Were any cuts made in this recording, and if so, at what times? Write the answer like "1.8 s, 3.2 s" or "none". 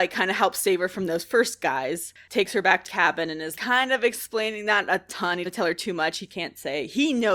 2.9 s, 3.6 s, 5.5 s

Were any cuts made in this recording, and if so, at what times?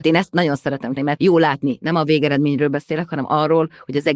1.0 s

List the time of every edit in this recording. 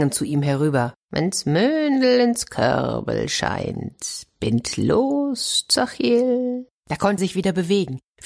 1.0 s, 6.7 s, 7.2 s

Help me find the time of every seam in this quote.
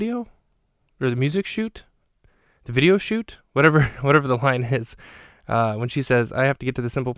none

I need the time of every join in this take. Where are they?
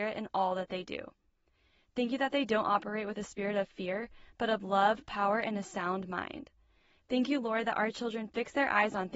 none

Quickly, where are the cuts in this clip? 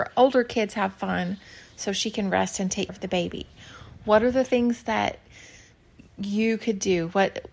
2.9 s

